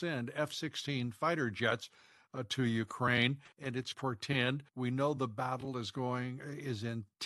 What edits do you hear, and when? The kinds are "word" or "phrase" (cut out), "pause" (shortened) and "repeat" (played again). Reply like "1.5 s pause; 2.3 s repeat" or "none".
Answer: 3.5 s pause; 3.9 s phrase; 4.7 s pause